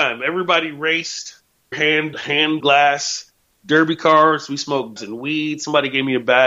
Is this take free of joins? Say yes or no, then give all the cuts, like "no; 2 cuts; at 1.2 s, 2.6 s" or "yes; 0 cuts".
no; 4 cuts; at 1.7 s, 2.1 s, 2.6 s, 5.0 s